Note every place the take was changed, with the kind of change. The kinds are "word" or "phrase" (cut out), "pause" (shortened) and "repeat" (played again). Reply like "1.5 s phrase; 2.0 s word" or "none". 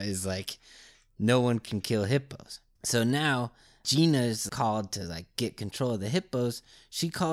none

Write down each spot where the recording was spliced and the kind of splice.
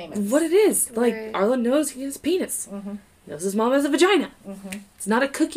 none

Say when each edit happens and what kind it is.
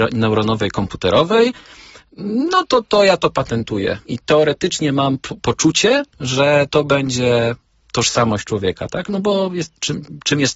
none

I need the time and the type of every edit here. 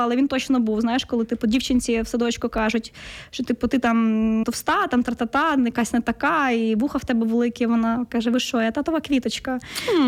4.4 s phrase

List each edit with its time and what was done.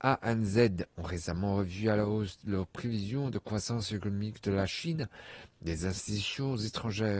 none

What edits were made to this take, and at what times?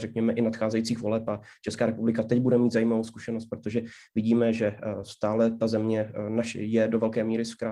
none

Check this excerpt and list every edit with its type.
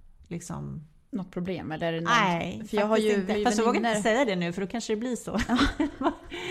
3.3 s word

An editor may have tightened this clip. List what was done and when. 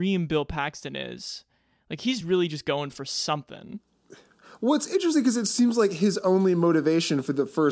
none

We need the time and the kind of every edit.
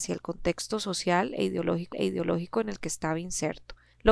1.9 s repeat

